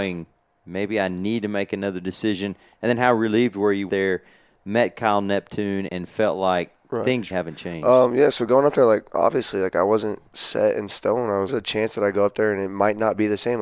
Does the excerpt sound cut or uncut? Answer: cut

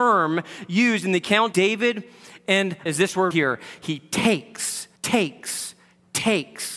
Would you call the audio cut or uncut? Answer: cut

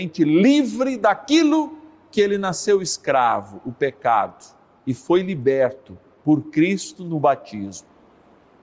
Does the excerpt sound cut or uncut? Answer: uncut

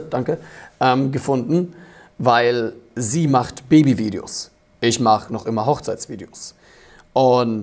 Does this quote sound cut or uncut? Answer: uncut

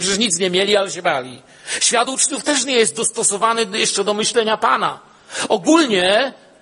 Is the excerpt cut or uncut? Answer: uncut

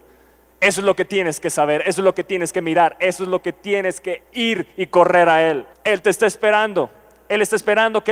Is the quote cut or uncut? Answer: cut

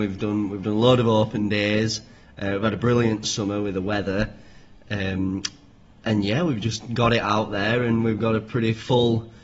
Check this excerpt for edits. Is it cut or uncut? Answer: uncut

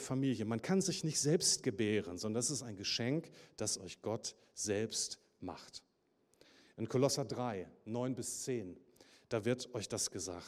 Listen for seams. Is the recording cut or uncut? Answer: uncut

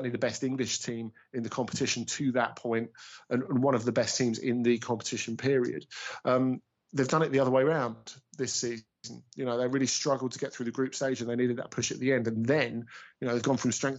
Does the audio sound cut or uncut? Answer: uncut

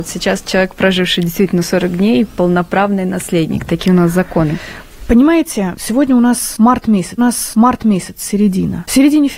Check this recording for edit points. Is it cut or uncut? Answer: cut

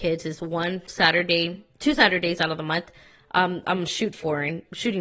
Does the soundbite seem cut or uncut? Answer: uncut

